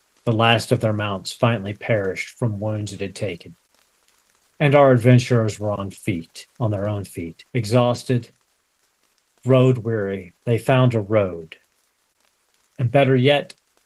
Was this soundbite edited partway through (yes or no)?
yes